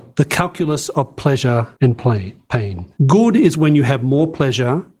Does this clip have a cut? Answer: yes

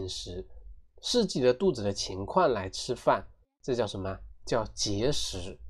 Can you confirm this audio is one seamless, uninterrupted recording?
yes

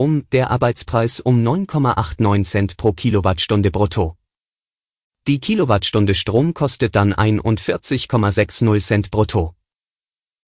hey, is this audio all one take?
yes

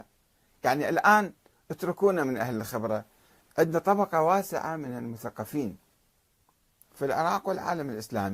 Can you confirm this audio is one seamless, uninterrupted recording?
yes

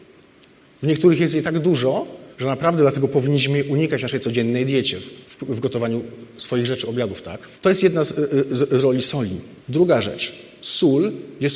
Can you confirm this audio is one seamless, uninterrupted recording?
no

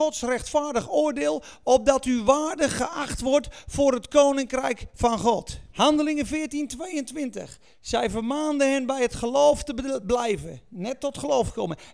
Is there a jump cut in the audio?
yes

